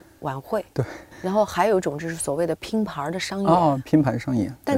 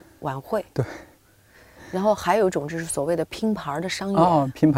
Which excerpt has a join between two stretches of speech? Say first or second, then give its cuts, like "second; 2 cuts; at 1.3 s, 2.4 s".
first; 1 cut; at 1.1 s